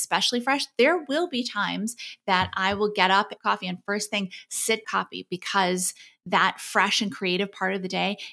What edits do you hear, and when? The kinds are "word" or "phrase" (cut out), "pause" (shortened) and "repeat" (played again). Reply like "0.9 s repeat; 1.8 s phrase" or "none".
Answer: 3.4 s phrase; 4.8 s phrase